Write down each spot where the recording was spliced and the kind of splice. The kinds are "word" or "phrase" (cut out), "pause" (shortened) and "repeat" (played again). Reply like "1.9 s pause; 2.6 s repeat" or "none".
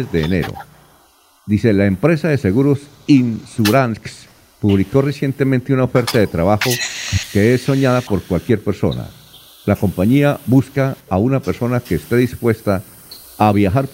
none